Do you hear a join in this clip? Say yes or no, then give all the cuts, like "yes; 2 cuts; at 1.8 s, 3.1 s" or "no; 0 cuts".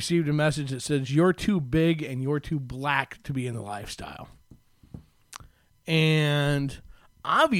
no; 0 cuts